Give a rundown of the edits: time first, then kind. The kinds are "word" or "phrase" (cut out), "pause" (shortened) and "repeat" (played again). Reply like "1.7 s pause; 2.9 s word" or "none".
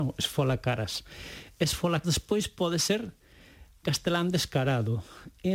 2.0 s word; 3.8 s word